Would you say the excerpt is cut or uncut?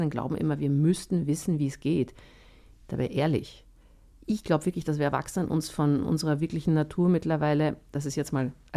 uncut